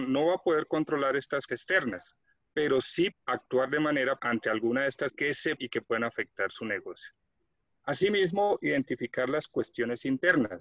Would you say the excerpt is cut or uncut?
cut